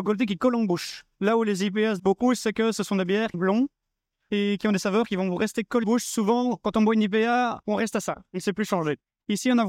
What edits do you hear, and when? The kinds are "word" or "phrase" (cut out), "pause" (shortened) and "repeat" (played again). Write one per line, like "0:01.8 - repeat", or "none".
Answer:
0:02.0 - word
0:03.3 - phrase
0:05.8 - word
0:07.6 - pause